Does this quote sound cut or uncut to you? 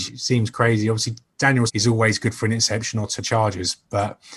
cut